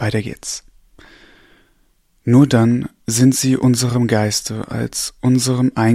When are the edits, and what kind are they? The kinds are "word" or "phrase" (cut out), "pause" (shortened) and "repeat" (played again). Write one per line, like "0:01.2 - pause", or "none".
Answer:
none